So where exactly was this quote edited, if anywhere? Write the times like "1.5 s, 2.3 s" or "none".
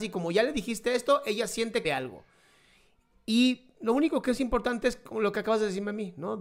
1.8 s